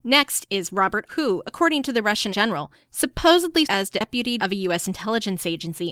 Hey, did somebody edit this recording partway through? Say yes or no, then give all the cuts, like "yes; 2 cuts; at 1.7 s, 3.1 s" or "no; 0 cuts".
yes; 4 cuts; at 1.1 s, 2.3 s, 3.6 s, 4.4 s